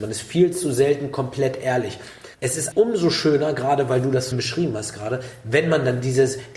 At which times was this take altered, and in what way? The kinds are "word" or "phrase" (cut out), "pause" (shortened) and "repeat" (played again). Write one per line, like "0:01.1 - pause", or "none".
0:02.3 - pause
0:02.7 - word
0:04.3 - word